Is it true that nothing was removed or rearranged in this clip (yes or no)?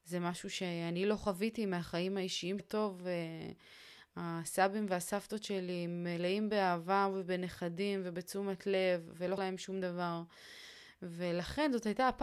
no